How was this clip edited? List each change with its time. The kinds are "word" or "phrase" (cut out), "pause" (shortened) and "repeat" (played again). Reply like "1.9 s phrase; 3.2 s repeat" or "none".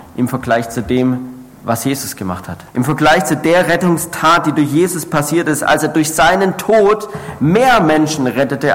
2.7 s pause